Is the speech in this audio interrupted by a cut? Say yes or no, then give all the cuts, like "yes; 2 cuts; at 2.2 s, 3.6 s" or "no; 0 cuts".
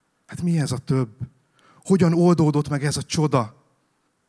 no; 0 cuts